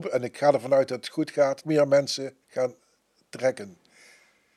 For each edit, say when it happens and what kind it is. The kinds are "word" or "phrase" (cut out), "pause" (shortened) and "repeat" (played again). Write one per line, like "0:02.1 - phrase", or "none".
0:01.6 - phrase
0:02.4 - pause